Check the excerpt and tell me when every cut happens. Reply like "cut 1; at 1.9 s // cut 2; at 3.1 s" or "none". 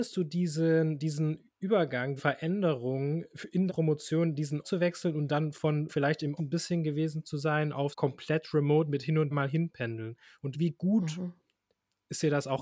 cut 1; at 2.2 s // cut 2; at 3.3 s // cut 3; at 3.7 s // cut 4; at 4.6 s // cut 5; at 5.9 s // cut 6; at 6.4 s // cut 7; at 7.9 s // cut 8; at 9.3 s // cut 9; at 10.5 s